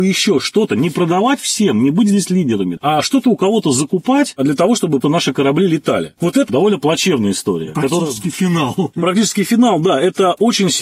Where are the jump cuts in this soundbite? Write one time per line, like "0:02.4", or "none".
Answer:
0:05.0
0:06.5